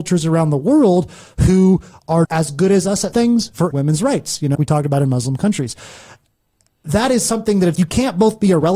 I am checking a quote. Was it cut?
yes; 5 cuts; at 2.2 s, 3.1 s, 3.7 s, 4.5 s, 7.7 s

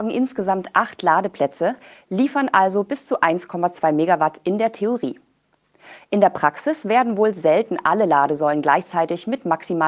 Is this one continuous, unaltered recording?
yes; 0 cuts

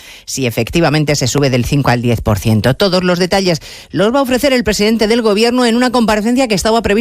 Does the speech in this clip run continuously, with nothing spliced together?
yes; 0 cuts

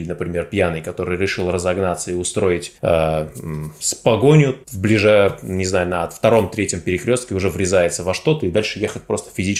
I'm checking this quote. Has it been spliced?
yes; 2 cuts; at 2.8 s, 4.6 s

